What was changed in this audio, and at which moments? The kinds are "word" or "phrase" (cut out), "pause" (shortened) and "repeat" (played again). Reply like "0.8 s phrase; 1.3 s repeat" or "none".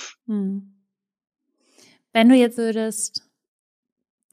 2.6 s word